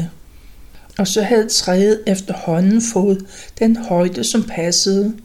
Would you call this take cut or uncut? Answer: uncut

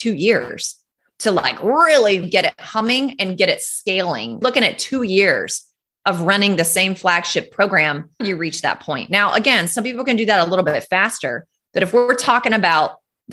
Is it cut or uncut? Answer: cut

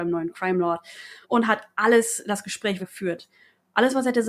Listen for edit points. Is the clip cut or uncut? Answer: cut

